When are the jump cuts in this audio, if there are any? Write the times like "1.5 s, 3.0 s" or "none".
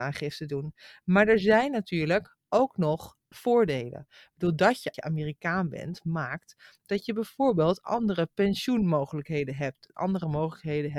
none